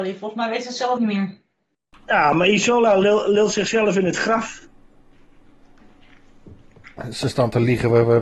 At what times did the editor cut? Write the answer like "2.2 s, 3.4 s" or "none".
1.0 s